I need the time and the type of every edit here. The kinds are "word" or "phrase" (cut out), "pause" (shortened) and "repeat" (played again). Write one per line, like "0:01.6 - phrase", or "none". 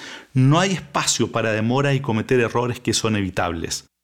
none